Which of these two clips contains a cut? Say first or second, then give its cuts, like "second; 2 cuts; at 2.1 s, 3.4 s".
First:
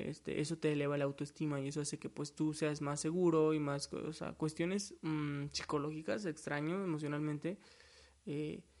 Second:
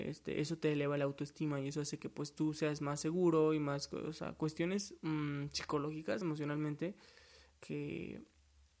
second; 2 cuts; at 6.2 s, 7.5 s